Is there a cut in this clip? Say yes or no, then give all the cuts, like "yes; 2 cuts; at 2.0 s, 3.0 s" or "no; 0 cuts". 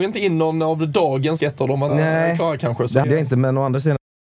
yes; 3 cuts; at 1.4 s, 1.9 s, 3.0 s